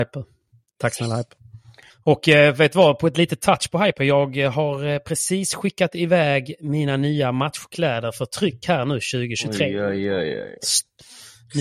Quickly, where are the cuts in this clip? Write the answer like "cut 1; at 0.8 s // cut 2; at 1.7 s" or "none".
cut 1; at 1.9 s